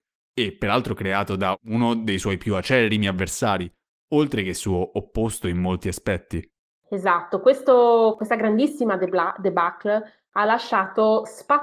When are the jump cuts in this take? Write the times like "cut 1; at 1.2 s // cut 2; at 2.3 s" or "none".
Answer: none